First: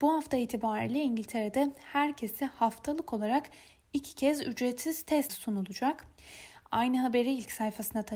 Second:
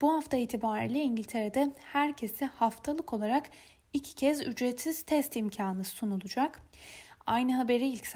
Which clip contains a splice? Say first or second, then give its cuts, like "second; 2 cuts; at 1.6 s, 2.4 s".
first; 1 cut; at 5.3 s